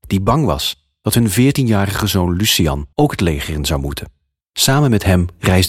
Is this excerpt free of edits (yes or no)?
no